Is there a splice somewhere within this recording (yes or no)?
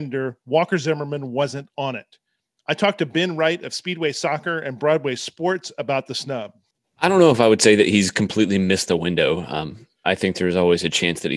yes